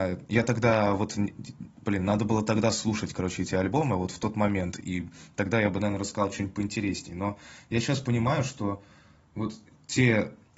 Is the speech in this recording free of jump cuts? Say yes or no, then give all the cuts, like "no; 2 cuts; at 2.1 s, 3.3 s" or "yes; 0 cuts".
yes; 0 cuts